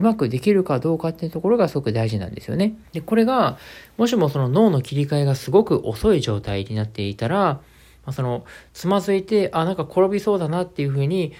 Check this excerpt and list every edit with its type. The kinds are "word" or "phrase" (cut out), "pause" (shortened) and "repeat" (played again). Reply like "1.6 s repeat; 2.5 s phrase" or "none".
2.9 s pause